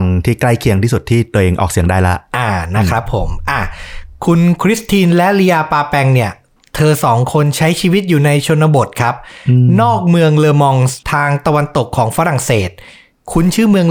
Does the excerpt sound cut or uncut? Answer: cut